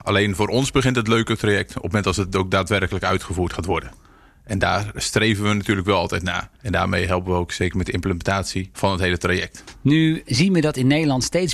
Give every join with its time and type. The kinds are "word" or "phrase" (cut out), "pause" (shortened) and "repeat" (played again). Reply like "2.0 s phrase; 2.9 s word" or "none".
6.6 s pause